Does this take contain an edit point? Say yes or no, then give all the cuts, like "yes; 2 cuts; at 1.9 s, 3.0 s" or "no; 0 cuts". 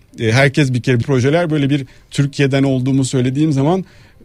yes; 1 cut; at 1.0 s